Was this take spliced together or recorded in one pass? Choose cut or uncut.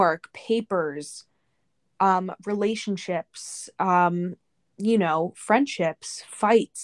uncut